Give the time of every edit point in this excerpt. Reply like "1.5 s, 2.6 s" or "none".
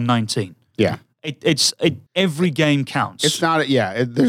2.1 s